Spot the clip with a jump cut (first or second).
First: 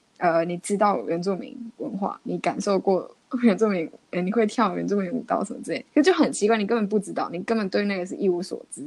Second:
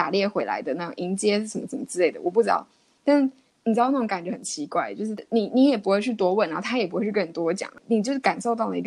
first